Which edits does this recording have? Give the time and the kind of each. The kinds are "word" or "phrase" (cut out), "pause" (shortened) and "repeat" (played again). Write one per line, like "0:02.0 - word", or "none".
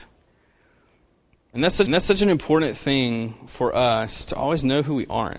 0:01.9 - repeat